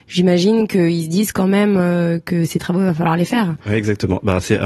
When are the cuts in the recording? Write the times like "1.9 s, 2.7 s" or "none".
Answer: none